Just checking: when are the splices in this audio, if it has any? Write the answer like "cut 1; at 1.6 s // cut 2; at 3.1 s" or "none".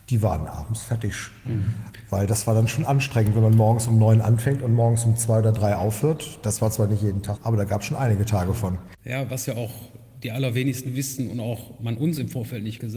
cut 1; at 7.4 s // cut 2; at 9.0 s